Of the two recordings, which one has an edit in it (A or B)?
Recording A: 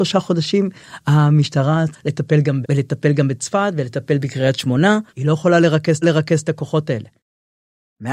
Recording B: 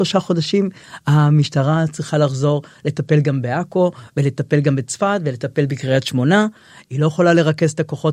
A